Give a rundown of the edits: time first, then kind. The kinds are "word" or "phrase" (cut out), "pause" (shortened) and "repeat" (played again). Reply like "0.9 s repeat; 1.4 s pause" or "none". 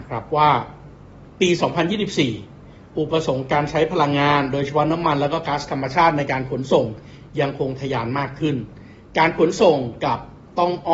none